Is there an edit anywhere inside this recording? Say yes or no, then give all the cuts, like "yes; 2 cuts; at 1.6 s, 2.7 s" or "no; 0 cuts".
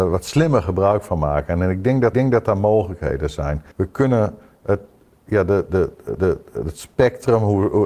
yes; 3 cuts; at 2.1 s, 3.7 s, 6.1 s